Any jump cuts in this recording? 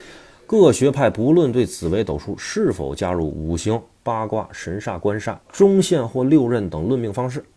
yes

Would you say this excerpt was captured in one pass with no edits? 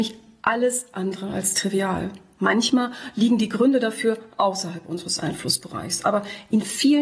yes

